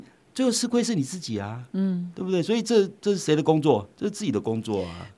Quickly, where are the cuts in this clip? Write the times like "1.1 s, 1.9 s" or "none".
3.9 s